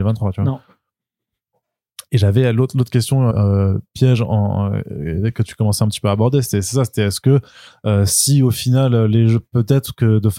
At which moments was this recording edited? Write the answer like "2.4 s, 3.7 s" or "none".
3.3 s